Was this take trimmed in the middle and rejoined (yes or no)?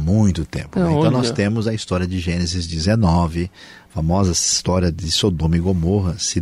no